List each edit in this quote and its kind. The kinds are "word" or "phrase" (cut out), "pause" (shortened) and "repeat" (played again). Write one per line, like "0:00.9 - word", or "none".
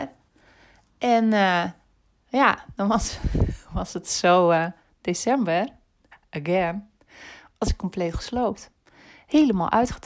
none